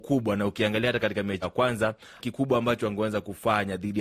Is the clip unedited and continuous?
no; 2 cuts; at 1.4 s, 2.2 s

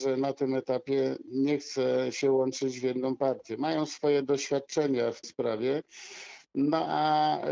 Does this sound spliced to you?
yes; 1 cut; at 5.2 s

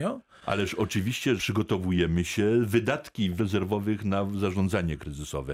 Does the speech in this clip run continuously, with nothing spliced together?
no; 2 cuts; at 1.4 s, 3.4 s

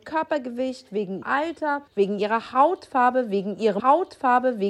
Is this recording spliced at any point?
yes; 3 cuts; at 1.2 s, 1.9 s, 3.8 s

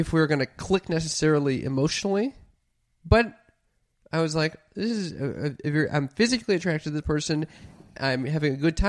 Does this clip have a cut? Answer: no; 0 cuts

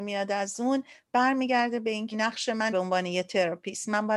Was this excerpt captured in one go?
no; 2 cuts; at 2.1 s, 2.7 s

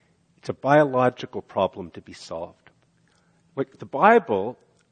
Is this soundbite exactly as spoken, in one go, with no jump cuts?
yes; 0 cuts

